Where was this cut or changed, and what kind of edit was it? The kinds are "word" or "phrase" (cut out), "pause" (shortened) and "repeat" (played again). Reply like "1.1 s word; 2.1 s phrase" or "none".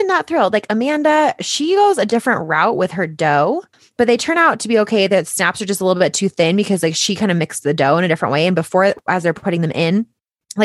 3.7 s pause

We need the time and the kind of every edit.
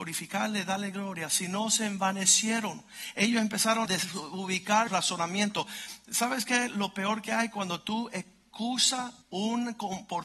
3.9 s word; 4.9 s word; 9.2 s pause

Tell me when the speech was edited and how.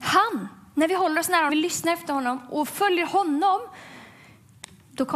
1.5 s word

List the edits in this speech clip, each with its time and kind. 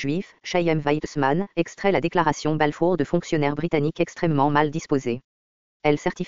none

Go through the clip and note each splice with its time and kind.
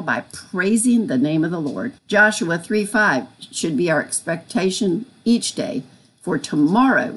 2.0 s pause

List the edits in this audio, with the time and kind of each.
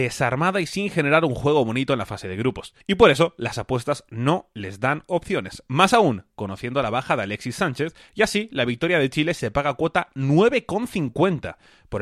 2.8 s pause

